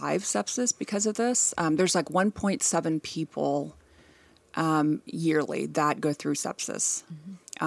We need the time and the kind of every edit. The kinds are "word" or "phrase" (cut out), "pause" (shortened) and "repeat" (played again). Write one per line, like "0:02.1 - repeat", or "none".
none